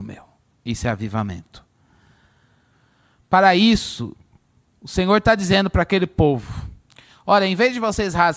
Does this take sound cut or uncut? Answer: uncut